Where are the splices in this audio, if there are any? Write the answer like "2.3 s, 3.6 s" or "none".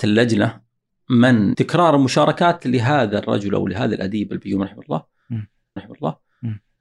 1.5 s, 5.8 s